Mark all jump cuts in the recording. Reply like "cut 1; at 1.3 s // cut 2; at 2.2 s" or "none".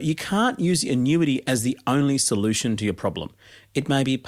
none